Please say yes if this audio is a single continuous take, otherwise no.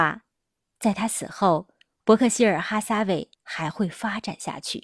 no